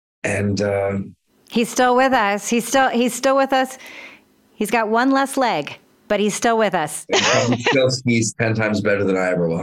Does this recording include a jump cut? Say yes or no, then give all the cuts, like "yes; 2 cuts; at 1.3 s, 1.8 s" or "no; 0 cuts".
no; 0 cuts